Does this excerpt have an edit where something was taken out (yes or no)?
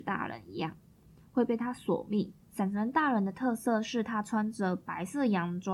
yes